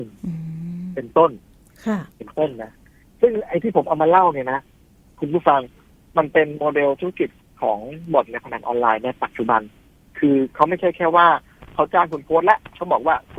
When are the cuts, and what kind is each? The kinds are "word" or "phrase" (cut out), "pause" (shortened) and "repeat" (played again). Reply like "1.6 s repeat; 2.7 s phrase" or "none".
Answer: none